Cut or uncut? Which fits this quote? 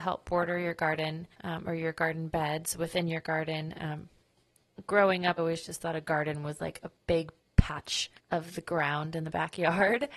cut